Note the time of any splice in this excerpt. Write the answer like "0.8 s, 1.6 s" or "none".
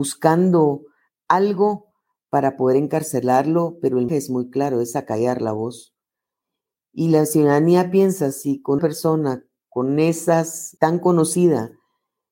4.1 s, 8.8 s, 10.8 s